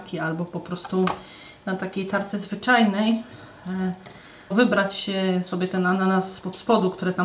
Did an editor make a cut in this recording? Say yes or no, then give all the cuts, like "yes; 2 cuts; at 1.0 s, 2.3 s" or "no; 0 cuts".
yes; 2 cuts; at 1.6 s, 4.5 s